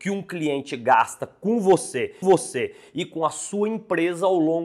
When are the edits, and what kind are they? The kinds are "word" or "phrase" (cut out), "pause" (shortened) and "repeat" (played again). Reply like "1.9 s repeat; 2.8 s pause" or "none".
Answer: 2.2 s repeat

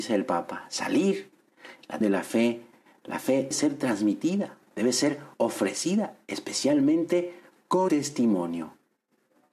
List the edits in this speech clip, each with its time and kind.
2.0 s word; 3.5 s word; 4.6 s pause; 5.3 s pause; 7.9 s word

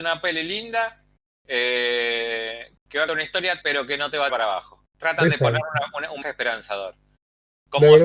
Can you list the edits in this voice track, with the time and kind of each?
2.8 s pause; 3.1 s word; 3.6 s word; 4.3 s phrase; 4.9 s pause; 6.2 s word

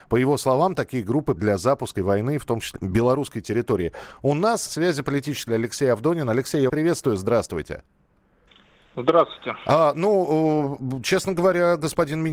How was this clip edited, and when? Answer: 1.4 s word; 2.0 s word; 2.8 s word; 4.7 s word; 5.5 s word; 6.7 s word

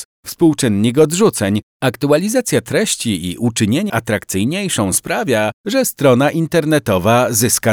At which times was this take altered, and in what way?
3.9 s word

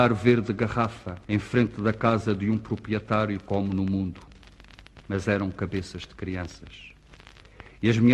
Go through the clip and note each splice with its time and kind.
1.2 s pause

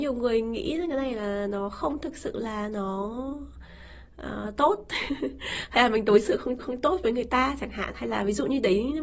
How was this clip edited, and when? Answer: 6.6 s repeat

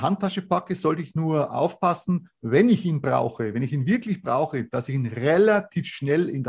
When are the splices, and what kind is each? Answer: none

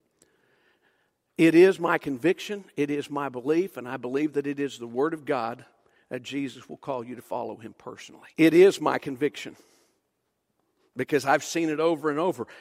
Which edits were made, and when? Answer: 8.3 s pause

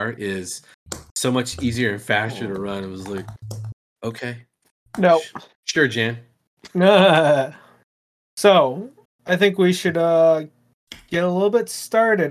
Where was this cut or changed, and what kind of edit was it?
5.5 s pause; 9.1 s pause

